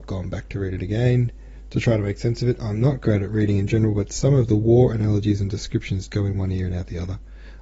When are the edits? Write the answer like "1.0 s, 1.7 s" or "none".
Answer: 6.1 s